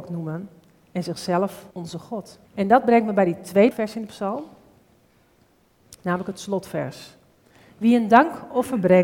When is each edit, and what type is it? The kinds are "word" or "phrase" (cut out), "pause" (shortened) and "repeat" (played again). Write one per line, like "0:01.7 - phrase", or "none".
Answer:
0:01.7 - pause
0:02.4 - pause
0:03.7 - word